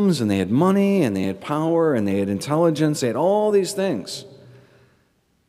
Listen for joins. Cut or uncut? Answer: uncut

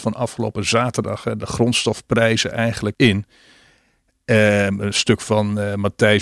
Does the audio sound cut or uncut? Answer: cut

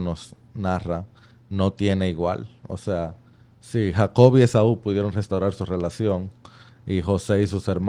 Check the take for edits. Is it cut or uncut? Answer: uncut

